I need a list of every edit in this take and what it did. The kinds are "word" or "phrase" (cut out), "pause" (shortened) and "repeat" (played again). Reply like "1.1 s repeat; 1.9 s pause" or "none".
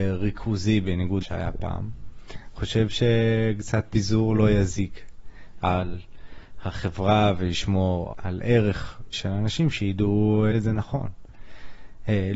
1.2 s word; 2.6 s word; 3.9 s word; 5.6 s word; 8.1 s word; 9.1 s word; 10.5 s word